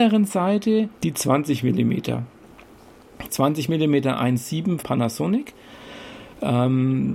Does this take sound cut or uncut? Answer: cut